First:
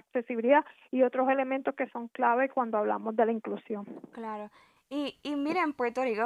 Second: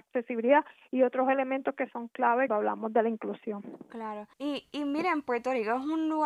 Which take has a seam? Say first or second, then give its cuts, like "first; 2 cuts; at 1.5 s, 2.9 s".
second; 2 cuts; at 2.5 s, 4.3 s